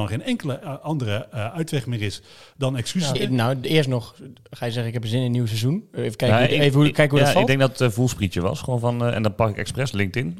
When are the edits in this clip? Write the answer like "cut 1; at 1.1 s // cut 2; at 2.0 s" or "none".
cut 1; at 3.1 s